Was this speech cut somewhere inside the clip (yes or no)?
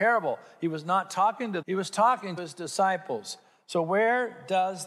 yes